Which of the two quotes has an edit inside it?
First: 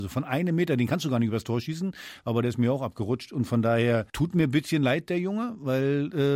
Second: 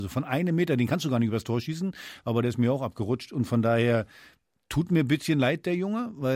first; 1 cut; at 4.1 s

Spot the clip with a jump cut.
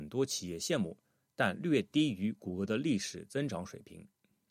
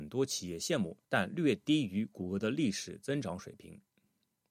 second; 1 cut; at 1.0 s

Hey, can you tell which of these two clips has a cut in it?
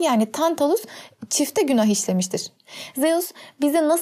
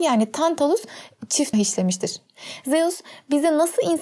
second; 1 cut; at 1.5 s

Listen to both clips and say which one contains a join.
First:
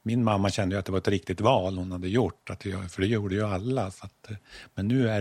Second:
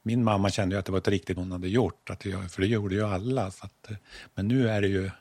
second; 1 cut; at 1.4 s

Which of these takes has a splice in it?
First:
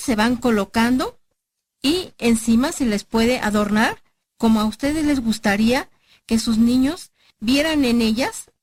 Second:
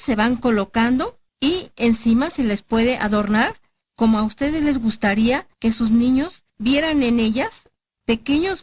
second; 3 cuts; at 1.3 s, 5.5 s, 6.5 s

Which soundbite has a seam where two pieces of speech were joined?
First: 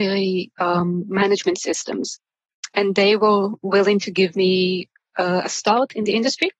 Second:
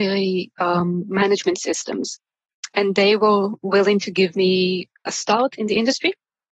second; 1 cut; at 5.1 s

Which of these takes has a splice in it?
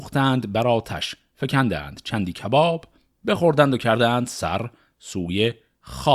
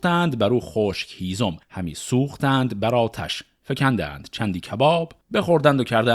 second; 2 cuts; at 1.6 s, 5.2 s

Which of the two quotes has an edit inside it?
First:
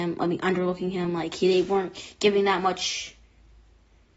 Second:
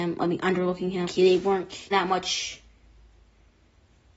second; 2 cuts; at 1.0 s, 1.9 s

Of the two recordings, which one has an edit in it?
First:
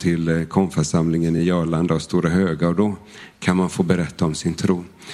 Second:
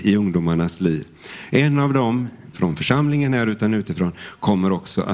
second; 1 cut; at 2.5 s

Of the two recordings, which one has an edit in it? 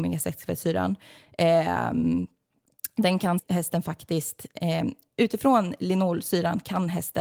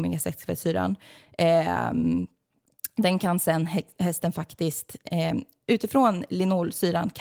first; 1 cut; at 3.4 s

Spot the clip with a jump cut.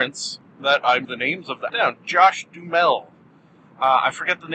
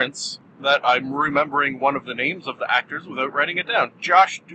first; 2 cuts; at 1.0 s, 1.7 s

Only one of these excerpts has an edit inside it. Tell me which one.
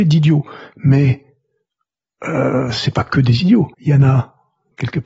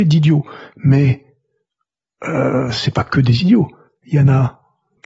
first; 1 cut; at 3.7 s

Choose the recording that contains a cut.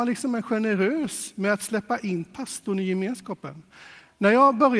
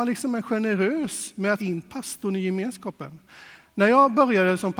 second; 1 cut; at 1.6 s

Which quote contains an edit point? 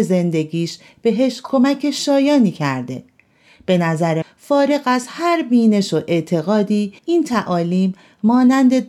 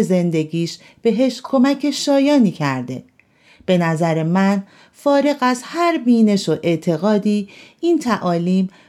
first; 2 cuts; at 4.2 s, 7.0 s

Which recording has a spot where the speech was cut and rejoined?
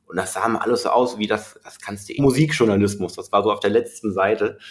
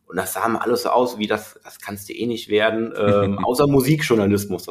first; 1 cut; at 2.2 s

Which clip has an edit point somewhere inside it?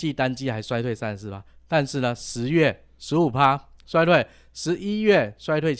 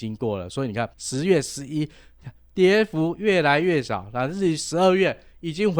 second; 1 cut; at 0.9 s

